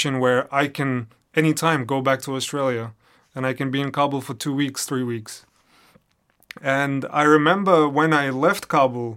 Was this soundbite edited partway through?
no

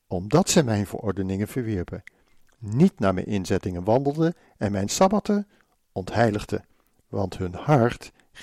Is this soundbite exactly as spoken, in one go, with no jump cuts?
yes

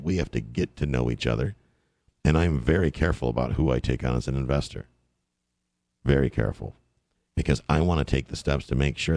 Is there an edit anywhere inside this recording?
no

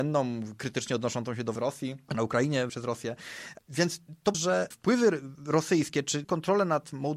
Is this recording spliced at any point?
yes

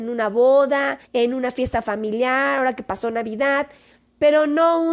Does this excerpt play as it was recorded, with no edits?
no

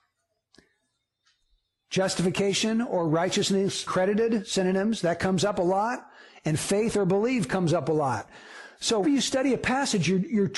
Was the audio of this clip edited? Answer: yes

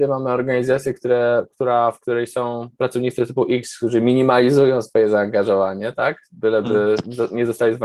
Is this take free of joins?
yes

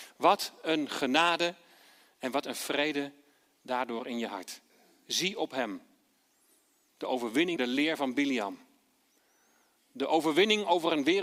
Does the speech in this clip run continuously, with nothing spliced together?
no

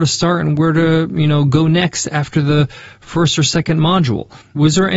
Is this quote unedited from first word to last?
yes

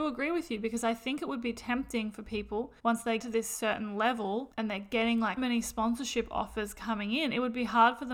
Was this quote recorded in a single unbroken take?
no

